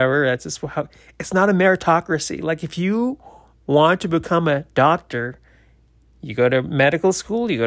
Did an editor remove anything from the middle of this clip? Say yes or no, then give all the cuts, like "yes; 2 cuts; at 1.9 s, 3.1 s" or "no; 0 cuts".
no; 0 cuts